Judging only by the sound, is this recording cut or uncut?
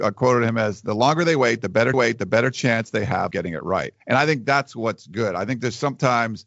cut